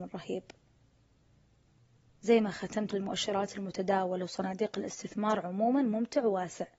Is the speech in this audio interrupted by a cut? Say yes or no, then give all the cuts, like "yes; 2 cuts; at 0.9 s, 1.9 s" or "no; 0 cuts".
yes; 2 cuts; at 2.2 s, 2.9 s